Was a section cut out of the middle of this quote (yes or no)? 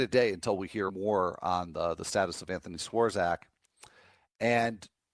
no